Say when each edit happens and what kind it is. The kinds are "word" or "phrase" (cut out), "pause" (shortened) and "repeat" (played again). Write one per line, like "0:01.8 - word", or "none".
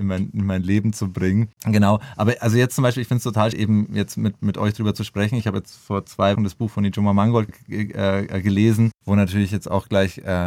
0:01.6 - pause
0:03.5 - word
0:04.4 - word
0:06.4 - word
0:07.5 - word
0:09.0 - pause